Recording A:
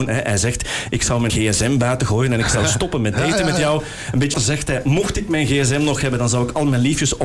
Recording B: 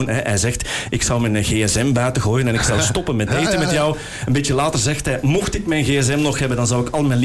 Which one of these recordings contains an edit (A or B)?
A